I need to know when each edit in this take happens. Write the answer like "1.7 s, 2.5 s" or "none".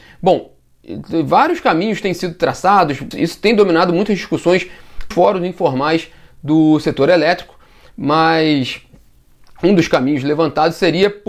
3.1 s, 5.1 s